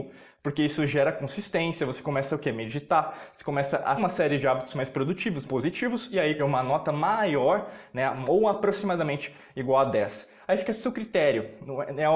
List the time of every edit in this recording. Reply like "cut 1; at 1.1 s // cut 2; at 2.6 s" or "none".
cut 1; at 4.0 s // cut 2; at 5.4 s // cut 3; at 6.4 s